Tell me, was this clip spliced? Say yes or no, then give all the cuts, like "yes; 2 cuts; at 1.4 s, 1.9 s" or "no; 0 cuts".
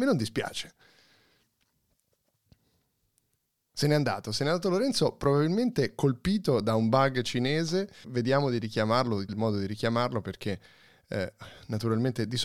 yes; 2 cuts; at 8.0 s, 9.3 s